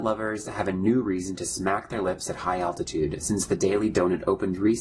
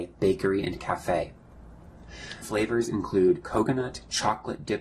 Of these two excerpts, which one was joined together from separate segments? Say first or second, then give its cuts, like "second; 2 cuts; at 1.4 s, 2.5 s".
second; 1 cut; at 2.4 s